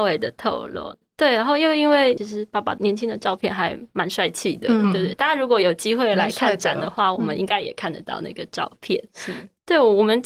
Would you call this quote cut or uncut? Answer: cut